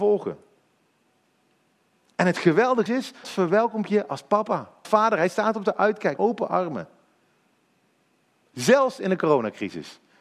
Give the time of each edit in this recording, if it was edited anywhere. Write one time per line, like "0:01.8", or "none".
0:02.9
0:03.2
0:04.8
0:06.2